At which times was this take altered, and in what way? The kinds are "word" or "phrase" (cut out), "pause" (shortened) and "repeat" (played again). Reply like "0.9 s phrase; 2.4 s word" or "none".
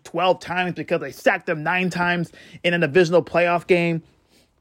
none